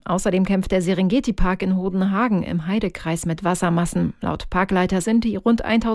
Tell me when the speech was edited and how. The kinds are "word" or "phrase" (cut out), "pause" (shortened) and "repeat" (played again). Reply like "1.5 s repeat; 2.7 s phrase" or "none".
5.0 s word